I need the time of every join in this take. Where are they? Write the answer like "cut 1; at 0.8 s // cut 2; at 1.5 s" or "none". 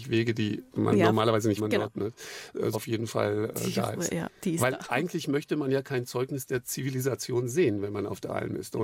cut 1; at 1.6 s // cut 2; at 2.7 s